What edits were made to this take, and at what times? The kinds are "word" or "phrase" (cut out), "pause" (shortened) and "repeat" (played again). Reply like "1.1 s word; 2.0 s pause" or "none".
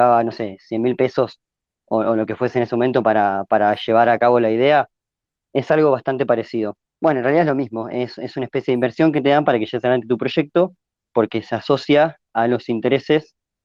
none